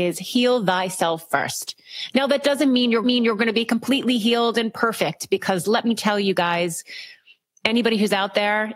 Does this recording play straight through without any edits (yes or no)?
no